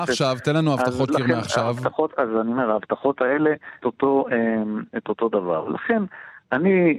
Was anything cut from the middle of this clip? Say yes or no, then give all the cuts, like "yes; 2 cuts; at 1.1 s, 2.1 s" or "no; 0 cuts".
yes; 2 cuts; at 1.1 s, 3.8 s